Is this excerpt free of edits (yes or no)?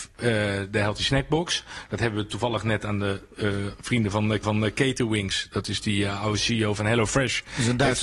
no